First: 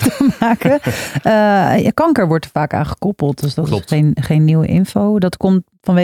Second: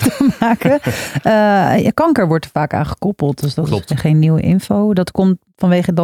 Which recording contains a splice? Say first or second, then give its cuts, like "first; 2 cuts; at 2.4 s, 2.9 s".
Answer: second; 1 cut; at 3.9 s